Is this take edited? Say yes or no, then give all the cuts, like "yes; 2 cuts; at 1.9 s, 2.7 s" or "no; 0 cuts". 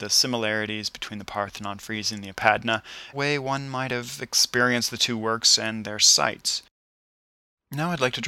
yes; 1 cut; at 3.1 s